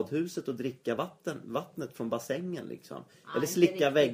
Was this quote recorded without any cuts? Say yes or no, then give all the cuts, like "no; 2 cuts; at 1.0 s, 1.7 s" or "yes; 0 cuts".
yes; 0 cuts